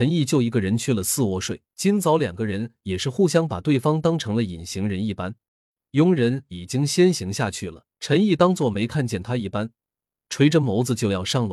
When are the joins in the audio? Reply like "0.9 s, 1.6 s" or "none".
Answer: 1.7 s, 5.5 s, 7.9 s